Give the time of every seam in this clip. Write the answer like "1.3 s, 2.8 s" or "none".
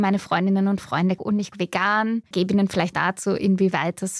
1.2 s, 1.5 s, 2.3 s, 2.9 s